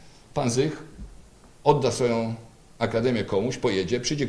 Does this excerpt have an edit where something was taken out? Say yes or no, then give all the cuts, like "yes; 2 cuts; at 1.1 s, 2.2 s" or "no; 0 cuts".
no; 0 cuts